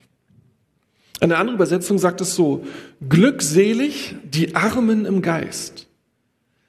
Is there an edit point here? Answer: no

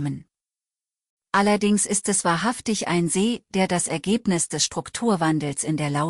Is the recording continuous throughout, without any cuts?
yes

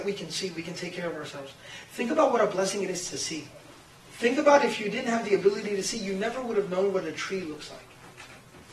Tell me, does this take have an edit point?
yes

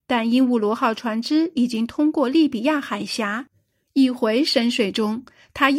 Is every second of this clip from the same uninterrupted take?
yes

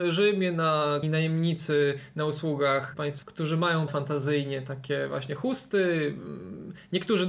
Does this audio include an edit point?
yes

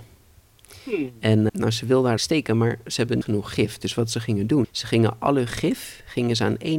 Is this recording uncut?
no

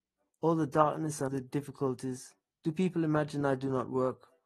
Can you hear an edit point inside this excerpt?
yes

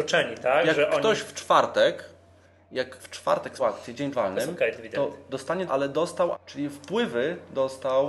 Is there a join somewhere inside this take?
yes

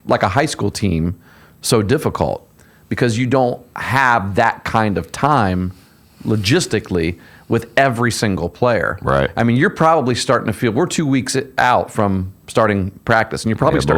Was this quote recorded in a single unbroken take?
yes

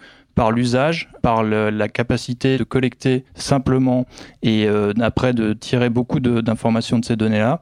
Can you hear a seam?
yes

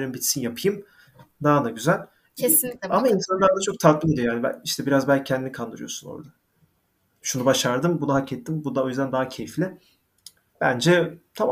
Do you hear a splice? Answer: no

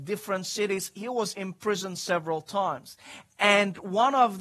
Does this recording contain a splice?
no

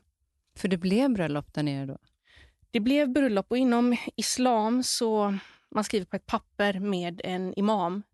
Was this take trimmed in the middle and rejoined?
no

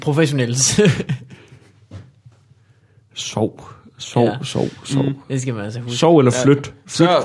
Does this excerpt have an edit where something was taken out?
no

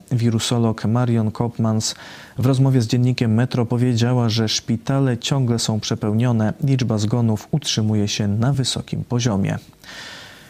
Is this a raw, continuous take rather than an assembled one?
yes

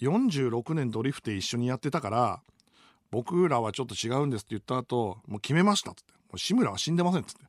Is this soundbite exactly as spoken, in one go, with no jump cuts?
yes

